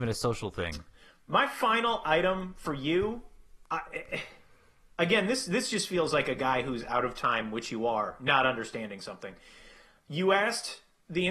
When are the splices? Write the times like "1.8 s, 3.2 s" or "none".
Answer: none